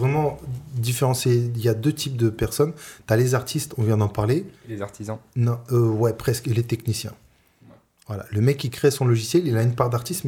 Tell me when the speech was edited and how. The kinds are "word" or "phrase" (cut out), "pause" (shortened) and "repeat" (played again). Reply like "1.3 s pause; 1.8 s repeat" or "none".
none